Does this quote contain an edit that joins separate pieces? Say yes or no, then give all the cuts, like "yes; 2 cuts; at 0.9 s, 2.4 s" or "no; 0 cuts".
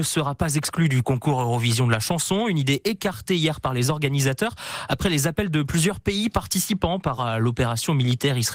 yes; 1 cut; at 7.2 s